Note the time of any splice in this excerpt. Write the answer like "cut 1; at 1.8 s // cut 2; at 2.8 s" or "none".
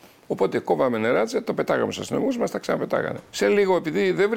cut 1; at 3.3 s